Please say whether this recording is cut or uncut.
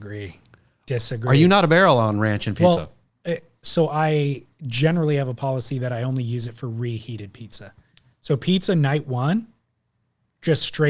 uncut